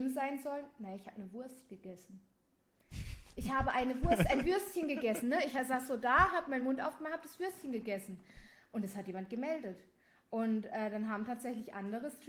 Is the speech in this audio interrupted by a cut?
no; 0 cuts

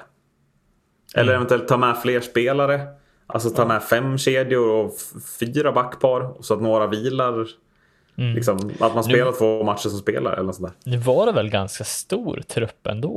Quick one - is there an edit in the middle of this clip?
no; 0 cuts

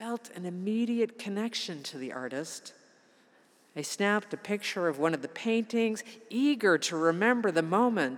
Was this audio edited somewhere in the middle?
no; 0 cuts

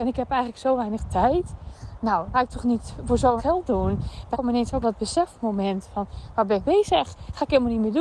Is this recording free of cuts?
no; 5 cuts; at 2.3 s, 3.4 s, 4.3 s, 4.8 s, 6.6 s

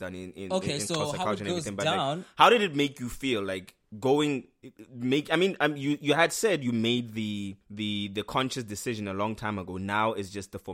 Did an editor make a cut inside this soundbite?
yes; 1 cut; at 7.6 s

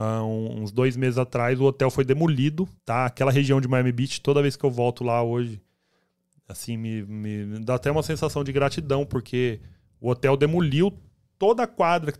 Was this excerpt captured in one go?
no; 1 cut; at 2.8 s

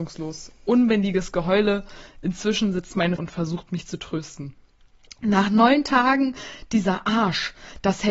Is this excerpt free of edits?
no; 1 cut; at 3.2 s

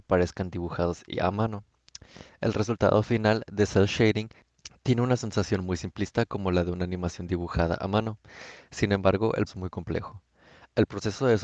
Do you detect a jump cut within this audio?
yes; 1 cut; at 9.5 s

